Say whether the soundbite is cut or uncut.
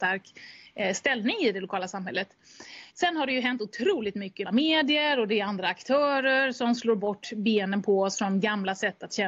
cut